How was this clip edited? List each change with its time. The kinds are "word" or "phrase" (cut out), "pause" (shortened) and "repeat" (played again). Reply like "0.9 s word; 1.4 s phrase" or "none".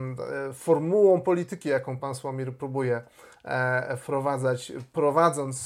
none